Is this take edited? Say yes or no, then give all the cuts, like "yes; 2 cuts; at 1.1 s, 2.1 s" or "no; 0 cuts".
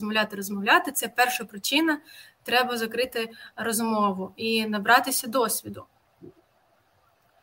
no; 0 cuts